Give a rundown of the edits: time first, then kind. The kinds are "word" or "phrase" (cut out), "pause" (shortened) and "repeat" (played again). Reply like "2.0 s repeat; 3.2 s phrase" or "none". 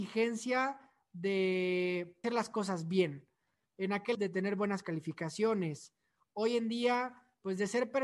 2.2 s word; 4.1 s word